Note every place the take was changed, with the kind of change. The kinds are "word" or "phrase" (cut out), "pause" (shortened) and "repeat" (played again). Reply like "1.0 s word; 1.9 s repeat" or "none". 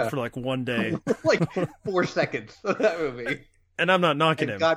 none